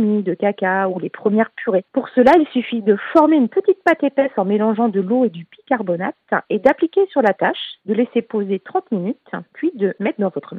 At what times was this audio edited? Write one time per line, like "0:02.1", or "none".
none